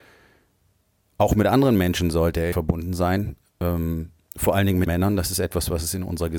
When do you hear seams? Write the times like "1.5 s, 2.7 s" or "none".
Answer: 2.5 s, 4.9 s